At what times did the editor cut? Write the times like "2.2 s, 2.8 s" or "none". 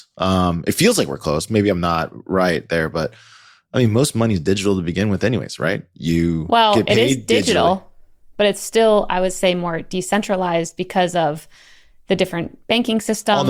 none